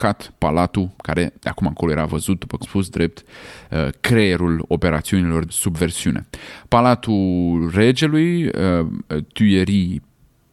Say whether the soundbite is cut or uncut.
cut